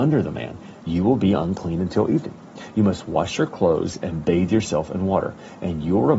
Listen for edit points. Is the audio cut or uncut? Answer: uncut